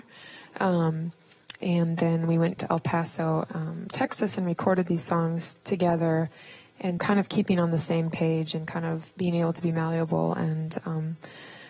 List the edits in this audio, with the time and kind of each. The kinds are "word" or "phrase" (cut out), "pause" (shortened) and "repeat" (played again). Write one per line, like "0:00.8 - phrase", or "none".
0:02.6 - word
0:07.0 - word
0:09.1 - pause